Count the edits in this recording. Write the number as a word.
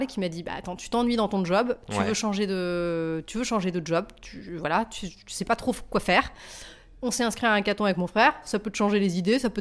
zero